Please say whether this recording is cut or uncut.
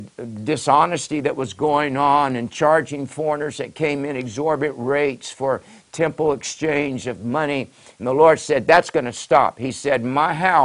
uncut